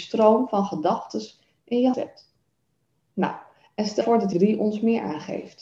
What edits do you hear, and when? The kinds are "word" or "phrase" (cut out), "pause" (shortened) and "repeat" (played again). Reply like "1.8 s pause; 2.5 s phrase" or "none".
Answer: 1.9 s word; 4.0 s word; 4.3 s phrase